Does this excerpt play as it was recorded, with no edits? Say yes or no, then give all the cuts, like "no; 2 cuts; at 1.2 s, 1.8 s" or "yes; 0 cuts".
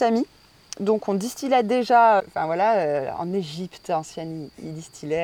no; 1 cut; at 2.2 s